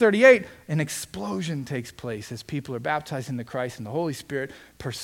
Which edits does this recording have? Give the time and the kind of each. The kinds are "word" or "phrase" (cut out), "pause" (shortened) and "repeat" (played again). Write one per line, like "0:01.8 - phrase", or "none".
none